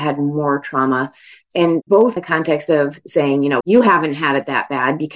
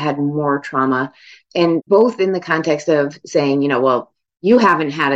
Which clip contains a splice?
first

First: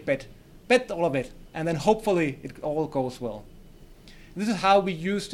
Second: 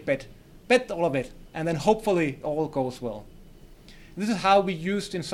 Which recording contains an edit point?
second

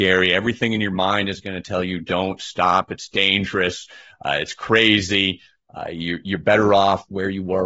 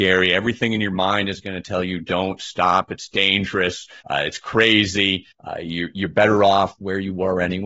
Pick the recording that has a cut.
second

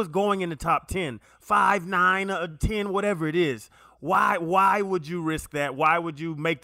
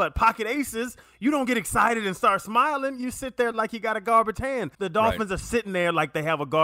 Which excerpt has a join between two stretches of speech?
second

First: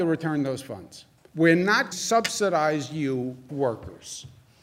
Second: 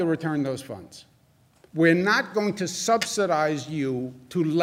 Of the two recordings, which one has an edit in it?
first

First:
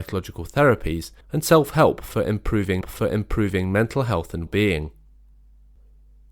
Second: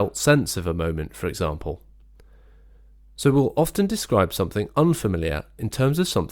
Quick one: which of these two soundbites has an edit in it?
first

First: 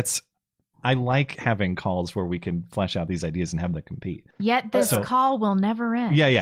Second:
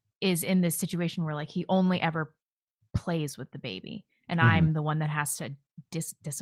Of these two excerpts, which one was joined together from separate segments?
first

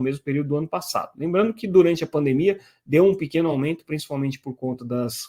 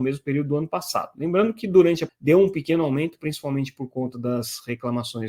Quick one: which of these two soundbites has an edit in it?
second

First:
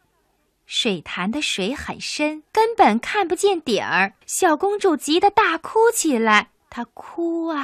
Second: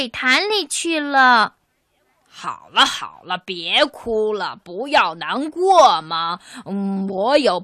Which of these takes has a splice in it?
first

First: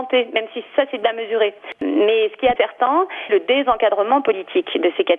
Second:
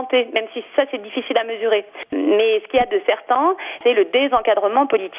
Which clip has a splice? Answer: first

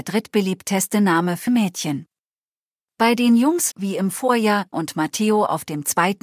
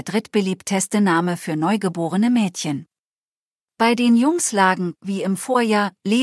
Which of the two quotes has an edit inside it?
first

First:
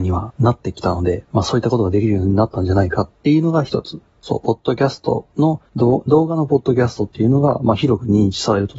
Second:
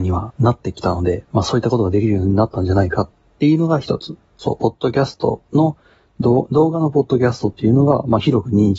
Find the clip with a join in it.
first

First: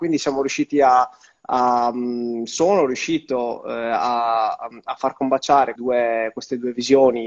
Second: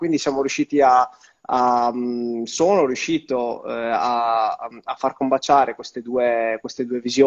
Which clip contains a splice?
first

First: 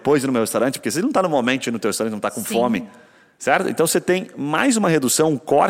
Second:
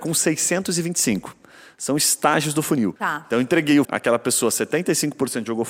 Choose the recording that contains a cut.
second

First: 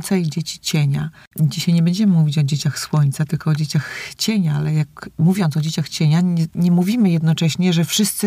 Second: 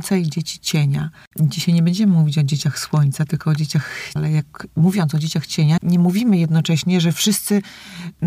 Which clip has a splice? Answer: second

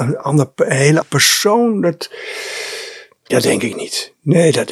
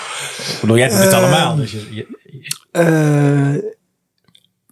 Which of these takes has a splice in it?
first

